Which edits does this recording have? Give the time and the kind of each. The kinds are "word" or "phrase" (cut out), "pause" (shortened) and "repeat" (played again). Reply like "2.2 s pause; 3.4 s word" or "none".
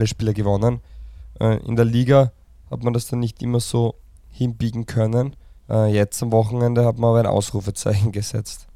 5.6 s pause